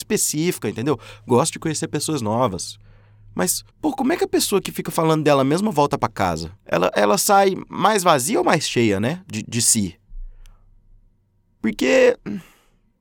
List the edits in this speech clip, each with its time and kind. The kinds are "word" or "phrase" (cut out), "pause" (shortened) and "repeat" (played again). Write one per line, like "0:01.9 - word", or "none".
0:03.7 - pause
0:06.6 - pause
0:09.4 - word